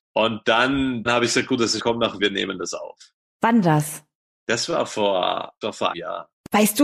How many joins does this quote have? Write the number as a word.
six